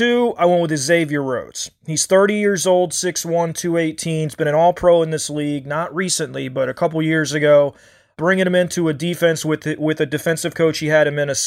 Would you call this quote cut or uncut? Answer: uncut